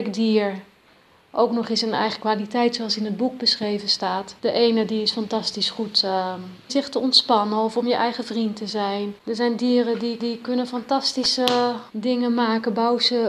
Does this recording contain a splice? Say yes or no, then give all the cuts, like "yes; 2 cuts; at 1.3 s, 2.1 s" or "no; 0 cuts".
yes; 5 cuts; at 4.4 s, 6.7 s, 9.2 s, 10.2 s, 11.9 s